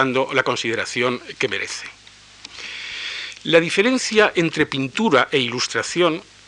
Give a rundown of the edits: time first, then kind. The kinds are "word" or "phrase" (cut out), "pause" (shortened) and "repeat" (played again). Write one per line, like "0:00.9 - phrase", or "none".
none

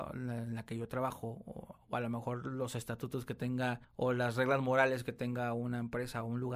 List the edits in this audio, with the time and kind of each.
0:03.8 - pause

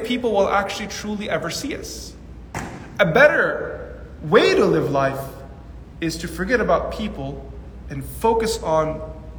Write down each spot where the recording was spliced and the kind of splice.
none

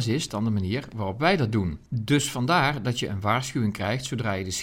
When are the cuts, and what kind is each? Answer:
0:01.9 - pause

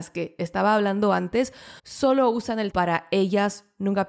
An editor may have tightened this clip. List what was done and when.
0:01.8 - pause
0:02.7 - word

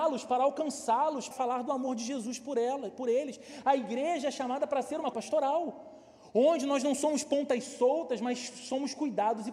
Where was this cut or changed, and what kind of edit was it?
0:01.3 - word
0:05.1 - word

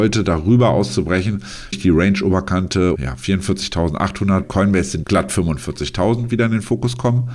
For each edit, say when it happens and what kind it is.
0:01.7 - word
0:03.0 - word
0:04.4 - word
0:05.0 - word

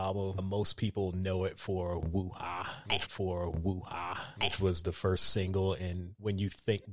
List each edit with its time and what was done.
0:03.1 - repeat

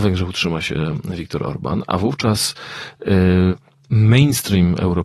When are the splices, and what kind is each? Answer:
none

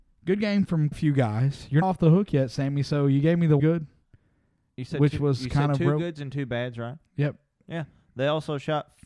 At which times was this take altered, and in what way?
0:00.9 - word
0:01.8 - word
0:03.6 - word

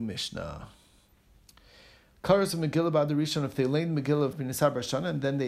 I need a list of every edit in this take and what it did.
0:04.3 - phrase

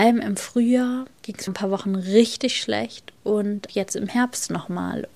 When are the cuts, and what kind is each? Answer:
0:01.1 - pause
0:01.5 - phrase
0:03.7 - word

